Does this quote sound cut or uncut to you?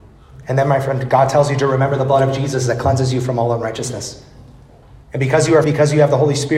cut